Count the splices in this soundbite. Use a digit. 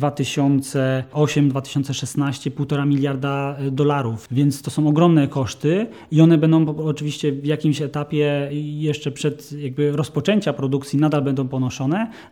0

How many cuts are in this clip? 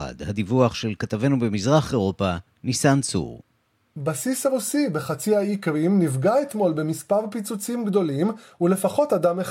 0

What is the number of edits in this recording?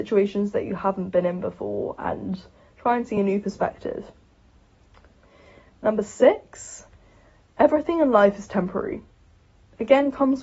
0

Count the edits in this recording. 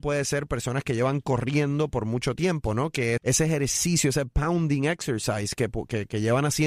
1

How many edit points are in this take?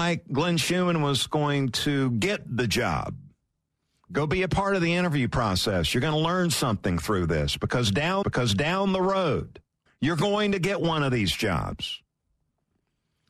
2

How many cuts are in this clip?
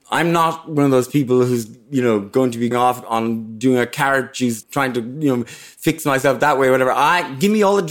2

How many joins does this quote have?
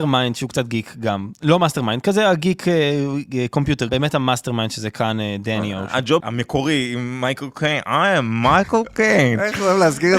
2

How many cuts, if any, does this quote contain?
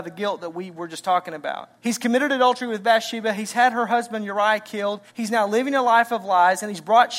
2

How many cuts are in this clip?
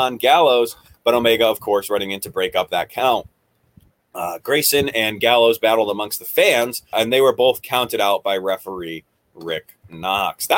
1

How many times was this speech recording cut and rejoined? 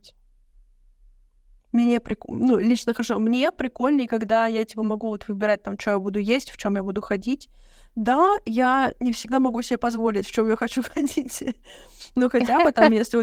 0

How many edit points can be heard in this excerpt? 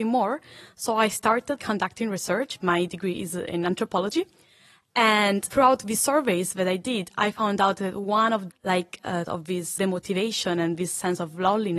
6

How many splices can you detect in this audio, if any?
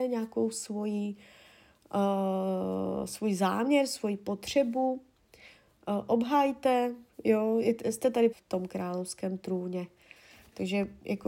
1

